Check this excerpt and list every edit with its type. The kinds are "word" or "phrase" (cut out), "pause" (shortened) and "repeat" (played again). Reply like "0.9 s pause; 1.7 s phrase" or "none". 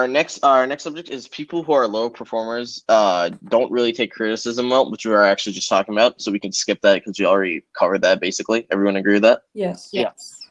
9.5 s pause